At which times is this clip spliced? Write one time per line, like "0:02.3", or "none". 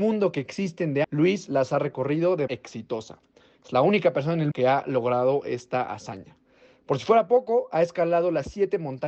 0:01.0
0:02.5
0:04.5